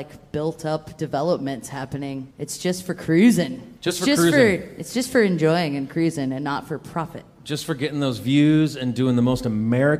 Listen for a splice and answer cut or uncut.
cut